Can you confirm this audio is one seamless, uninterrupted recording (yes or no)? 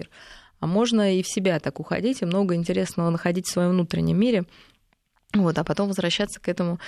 yes